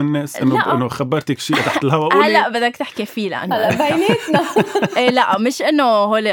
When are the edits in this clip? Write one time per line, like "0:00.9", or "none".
none